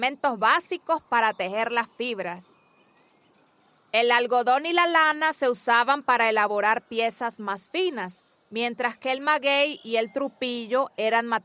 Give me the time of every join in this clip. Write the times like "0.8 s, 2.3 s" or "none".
none